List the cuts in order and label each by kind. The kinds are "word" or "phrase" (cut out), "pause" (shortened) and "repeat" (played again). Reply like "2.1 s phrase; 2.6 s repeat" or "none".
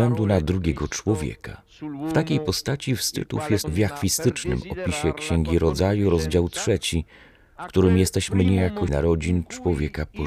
3.6 s word; 8.9 s word